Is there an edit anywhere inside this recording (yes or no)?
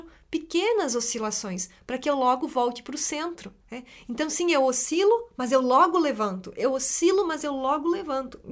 yes